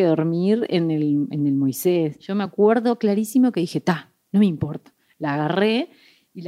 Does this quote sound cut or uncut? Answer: uncut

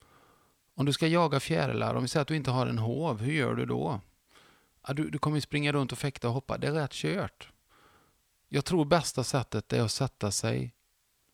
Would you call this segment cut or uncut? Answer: uncut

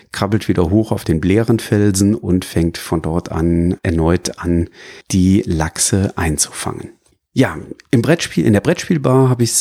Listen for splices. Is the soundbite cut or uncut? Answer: cut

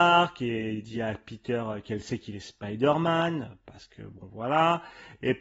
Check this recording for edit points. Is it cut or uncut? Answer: uncut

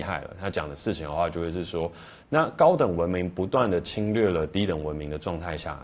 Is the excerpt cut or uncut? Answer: uncut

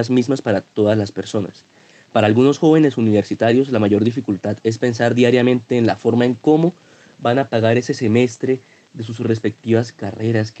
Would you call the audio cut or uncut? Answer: uncut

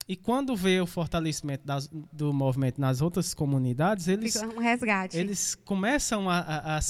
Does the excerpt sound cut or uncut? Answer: uncut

